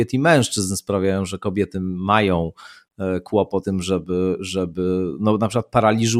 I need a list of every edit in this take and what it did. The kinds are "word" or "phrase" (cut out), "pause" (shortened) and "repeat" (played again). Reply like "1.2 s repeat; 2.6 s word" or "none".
3.6 s word